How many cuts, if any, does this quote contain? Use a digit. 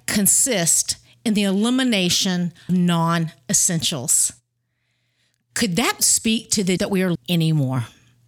4